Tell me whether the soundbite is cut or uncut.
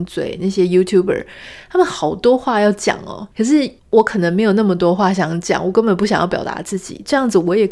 cut